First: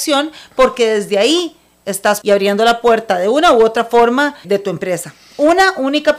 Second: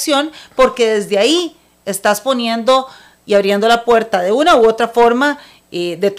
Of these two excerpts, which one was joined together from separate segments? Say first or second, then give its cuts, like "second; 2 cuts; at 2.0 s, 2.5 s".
first; 2 cuts; at 2.2 s, 4.4 s